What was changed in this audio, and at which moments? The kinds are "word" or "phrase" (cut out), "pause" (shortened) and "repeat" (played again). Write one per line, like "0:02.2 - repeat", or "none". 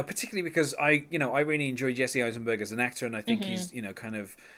none